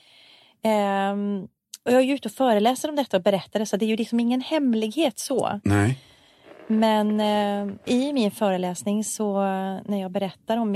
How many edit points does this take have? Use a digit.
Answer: 2